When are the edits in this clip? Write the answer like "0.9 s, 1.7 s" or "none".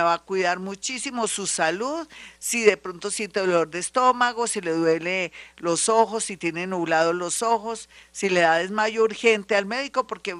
none